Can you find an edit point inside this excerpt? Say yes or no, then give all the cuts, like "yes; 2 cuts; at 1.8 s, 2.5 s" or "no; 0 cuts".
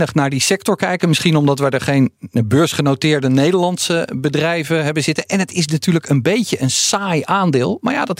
no; 0 cuts